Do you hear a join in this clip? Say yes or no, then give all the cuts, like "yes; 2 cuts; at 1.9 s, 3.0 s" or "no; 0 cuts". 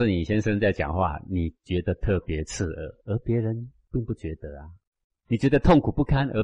no; 0 cuts